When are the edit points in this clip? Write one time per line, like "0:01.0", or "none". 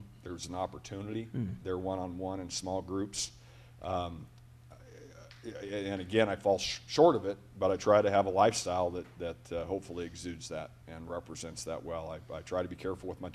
none